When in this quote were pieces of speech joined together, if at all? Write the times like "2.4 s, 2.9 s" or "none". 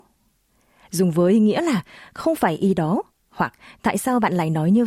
none

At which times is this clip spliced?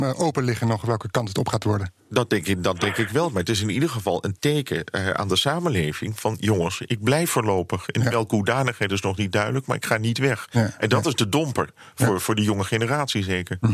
2.0 s

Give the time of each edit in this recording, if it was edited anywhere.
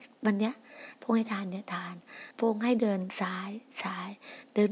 2.3 s

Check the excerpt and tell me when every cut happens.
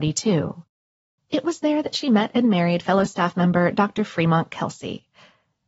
none

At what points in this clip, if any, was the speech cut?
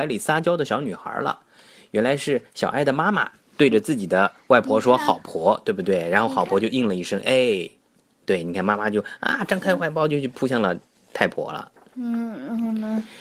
none

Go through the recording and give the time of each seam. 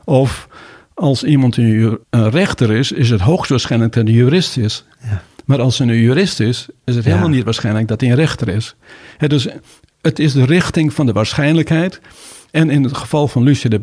2.0 s

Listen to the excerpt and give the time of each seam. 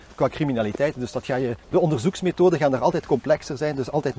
1.6 s

